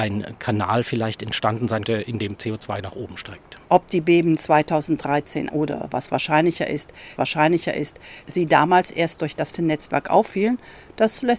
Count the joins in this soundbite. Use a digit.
5